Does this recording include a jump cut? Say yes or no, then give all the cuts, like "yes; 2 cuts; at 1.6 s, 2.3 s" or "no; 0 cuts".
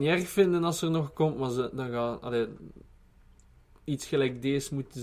no; 0 cuts